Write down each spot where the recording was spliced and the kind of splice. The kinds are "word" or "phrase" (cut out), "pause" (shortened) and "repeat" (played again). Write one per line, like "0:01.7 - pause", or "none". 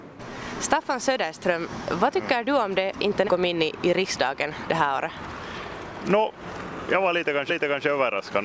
0:02.9 - word
0:03.2 - phrase
0:07.5 - repeat